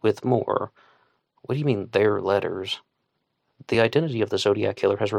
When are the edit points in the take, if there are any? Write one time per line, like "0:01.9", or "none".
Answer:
none